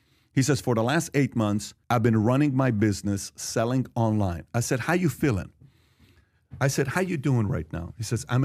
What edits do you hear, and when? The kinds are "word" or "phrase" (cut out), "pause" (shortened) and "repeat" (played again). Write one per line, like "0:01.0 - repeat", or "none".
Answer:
0:01.8 - pause